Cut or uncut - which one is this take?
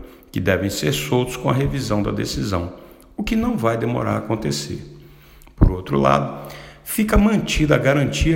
uncut